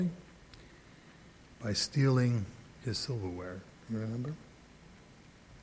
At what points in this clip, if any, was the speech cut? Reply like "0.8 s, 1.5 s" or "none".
none

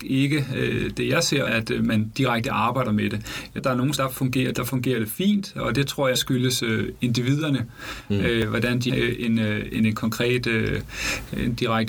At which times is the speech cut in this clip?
1.5 s, 3.6 s, 4.0 s, 4.5 s, 6.1 s, 8.9 s

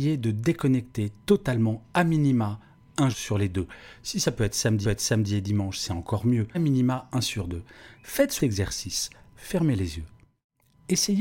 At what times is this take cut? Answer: 3.1 s, 4.8 s, 6.5 s, 8.4 s

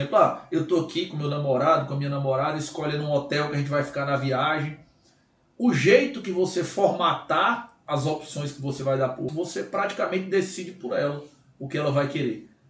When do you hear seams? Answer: 9.3 s

